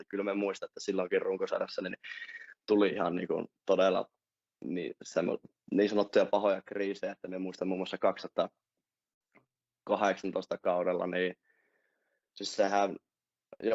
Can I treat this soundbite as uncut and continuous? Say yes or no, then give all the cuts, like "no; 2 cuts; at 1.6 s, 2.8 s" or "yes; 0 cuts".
yes; 0 cuts